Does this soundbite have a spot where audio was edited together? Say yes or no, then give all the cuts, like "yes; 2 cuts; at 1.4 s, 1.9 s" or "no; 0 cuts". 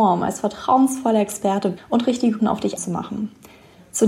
yes; 3 cuts; at 1.8 s, 2.4 s, 2.8 s